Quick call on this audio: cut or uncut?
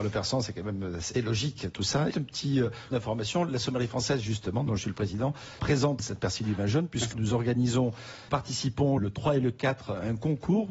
cut